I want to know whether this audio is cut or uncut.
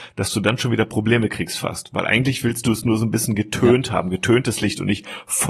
uncut